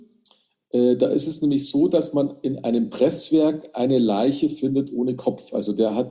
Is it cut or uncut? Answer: uncut